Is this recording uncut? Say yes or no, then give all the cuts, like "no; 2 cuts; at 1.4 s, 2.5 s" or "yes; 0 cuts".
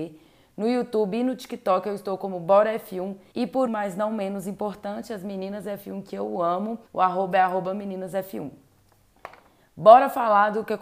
no; 3 cuts; at 3.3 s, 3.7 s, 6.9 s